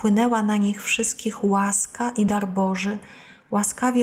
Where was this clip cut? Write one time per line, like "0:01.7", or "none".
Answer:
none